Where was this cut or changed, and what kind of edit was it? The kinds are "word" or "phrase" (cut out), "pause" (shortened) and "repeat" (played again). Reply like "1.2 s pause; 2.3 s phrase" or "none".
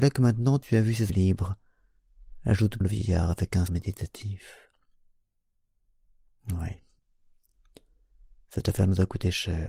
1.1 s word; 2.8 s word; 3.7 s word

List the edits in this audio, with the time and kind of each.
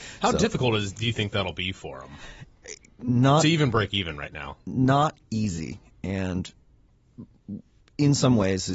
none

